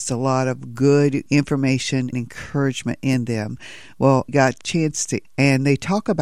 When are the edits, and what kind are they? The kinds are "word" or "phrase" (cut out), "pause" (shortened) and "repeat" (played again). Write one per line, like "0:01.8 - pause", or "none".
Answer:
0:01.3 - word
0:02.1 - word
0:04.3 - word
0:04.6 - word
0:05.2 - phrase